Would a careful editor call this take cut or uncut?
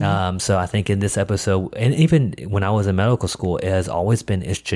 uncut